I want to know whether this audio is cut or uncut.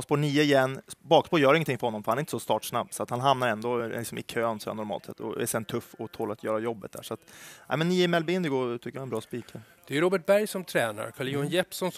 uncut